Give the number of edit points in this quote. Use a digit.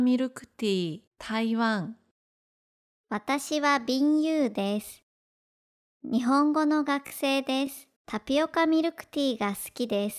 2